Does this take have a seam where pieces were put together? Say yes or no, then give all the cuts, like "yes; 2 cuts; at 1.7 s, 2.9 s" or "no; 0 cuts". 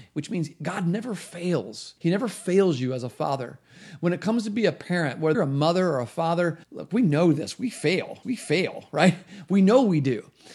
yes; 4 cuts; at 2.0 s, 5.3 s, 6.6 s, 8.2 s